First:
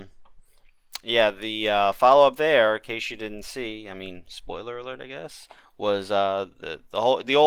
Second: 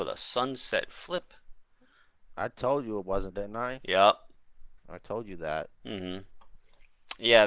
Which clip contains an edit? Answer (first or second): second